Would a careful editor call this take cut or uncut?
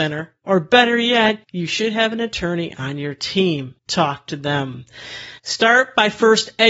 cut